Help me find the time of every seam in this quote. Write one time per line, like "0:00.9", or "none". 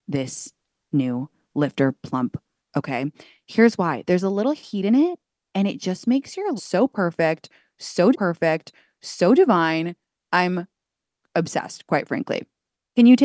0:06.6
0:08.1